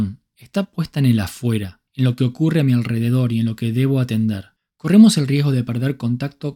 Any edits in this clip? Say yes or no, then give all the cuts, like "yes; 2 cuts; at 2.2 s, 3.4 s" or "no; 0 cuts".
yes; 2 cuts; at 1.9 s, 4.6 s